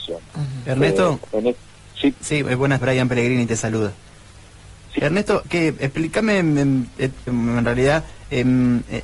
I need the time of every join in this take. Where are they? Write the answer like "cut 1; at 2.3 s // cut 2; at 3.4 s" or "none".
cut 1; at 1.2 s // cut 2; at 2.1 s // cut 3; at 2.8 s // cut 4; at 5.0 s // cut 5; at 5.4 s // cut 6; at 7.3 s